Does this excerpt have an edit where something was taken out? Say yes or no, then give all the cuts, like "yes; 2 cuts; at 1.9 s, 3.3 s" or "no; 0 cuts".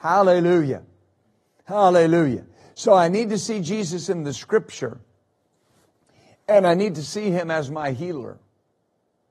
no; 0 cuts